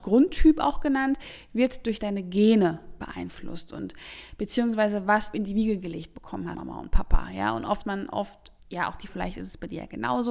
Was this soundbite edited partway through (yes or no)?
yes